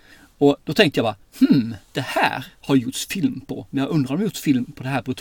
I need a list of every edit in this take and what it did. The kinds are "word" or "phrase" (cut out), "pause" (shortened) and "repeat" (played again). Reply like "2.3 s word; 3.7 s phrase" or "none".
1.9 s pause